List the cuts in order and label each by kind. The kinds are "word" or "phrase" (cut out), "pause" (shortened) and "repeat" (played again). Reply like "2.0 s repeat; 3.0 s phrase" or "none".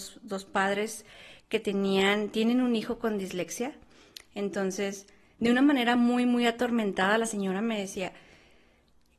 none